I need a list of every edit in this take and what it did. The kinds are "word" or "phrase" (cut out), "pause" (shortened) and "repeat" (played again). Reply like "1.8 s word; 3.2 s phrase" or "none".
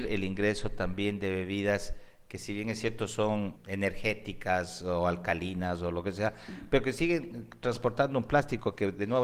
3.6 s word